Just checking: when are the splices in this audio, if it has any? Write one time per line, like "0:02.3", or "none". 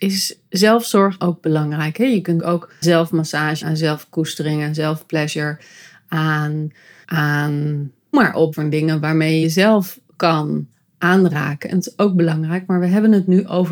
0:01.2
0:02.4
0:02.8
0:03.6
0:07.0
0:08.1
0:08.5
0:09.4